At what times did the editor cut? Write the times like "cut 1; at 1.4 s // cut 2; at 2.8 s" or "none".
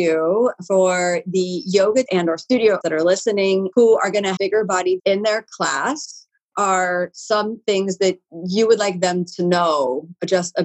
cut 1; at 2.1 s // cut 2; at 2.8 s // cut 3; at 3.7 s // cut 4; at 4.4 s // cut 5; at 5.0 s // cut 6; at 6.5 s